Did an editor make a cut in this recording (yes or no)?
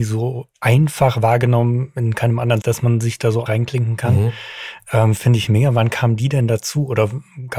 yes